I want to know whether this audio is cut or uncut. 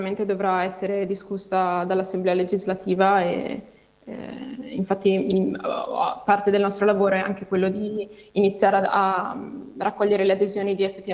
uncut